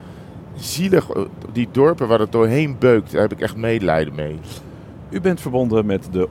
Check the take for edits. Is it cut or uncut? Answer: uncut